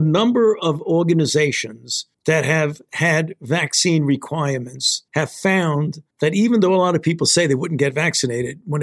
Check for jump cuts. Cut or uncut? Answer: cut